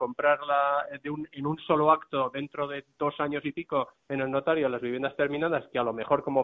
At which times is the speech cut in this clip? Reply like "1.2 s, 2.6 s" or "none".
4.0 s